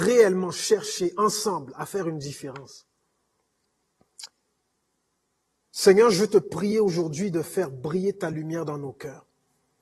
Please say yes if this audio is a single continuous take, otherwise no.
yes